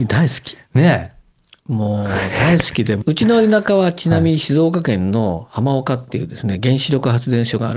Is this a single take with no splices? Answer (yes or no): yes